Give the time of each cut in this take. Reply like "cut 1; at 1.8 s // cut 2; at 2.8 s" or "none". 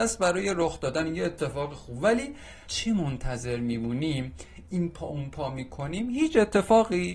cut 1; at 2.7 s